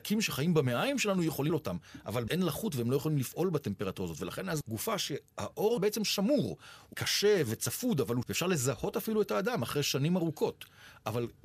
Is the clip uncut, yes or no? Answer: no